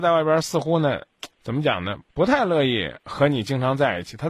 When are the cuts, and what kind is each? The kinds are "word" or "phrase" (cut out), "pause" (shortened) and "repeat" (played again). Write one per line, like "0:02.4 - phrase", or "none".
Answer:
0:01.3 - pause
0:02.1 - pause
0:03.0 - pause